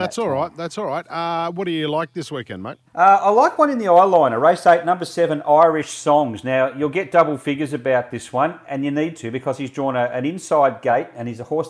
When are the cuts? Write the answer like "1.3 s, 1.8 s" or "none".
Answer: 2.9 s